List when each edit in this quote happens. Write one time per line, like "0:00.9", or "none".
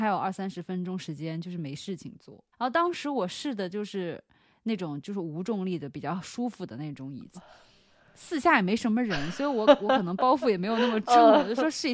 0:02.5
0:07.3